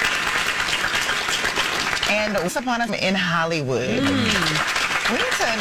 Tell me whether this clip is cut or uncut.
cut